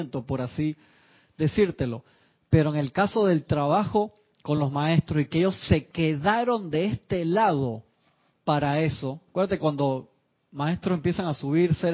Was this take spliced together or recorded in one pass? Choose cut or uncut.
uncut